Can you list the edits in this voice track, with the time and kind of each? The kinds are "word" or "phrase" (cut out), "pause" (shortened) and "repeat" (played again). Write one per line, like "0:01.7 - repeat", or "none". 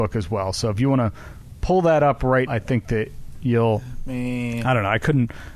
0:02.5 - word